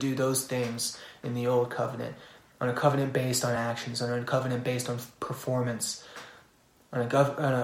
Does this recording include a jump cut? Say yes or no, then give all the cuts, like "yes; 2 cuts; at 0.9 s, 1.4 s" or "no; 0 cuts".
no; 0 cuts